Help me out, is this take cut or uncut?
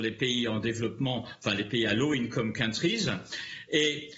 uncut